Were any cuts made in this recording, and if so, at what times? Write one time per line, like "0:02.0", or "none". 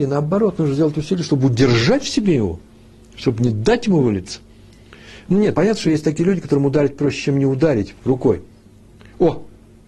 0:05.5